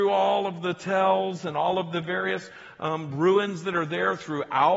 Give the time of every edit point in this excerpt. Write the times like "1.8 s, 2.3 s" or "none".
none